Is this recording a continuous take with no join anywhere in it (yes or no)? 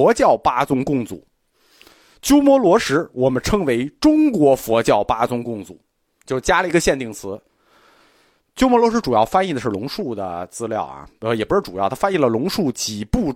yes